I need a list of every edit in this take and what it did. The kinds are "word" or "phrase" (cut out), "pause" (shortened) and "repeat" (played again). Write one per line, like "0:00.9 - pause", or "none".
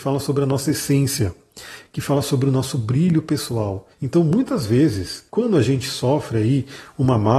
0:03.9 - pause
0:05.3 - pause